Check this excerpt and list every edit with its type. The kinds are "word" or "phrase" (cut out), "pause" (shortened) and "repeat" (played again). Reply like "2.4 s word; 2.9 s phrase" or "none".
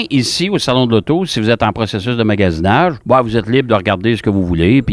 3.0 s pause